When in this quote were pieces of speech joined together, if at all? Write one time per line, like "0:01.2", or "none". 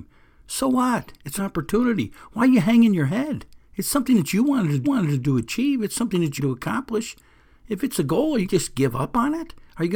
0:01.4
0:03.6
0:04.8
0:06.4
0:08.4